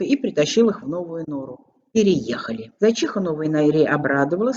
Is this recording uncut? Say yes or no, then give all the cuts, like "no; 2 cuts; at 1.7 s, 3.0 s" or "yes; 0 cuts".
no; 1 cut; at 2.8 s